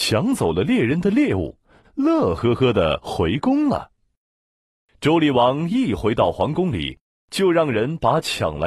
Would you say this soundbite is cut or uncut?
uncut